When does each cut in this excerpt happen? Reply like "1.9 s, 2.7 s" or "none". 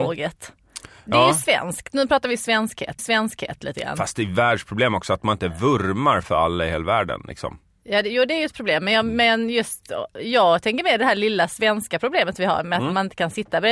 3.0 s, 6.2 s